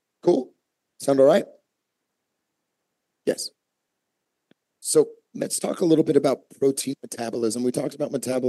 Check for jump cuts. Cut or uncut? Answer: uncut